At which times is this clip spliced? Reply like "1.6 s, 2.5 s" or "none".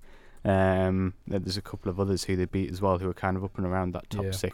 none